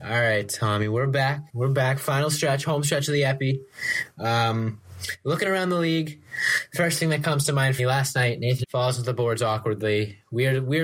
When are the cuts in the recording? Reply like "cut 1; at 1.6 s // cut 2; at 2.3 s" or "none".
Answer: cut 1; at 1.5 s // cut 2; at 7.8 s // cut 3; at 8.6 s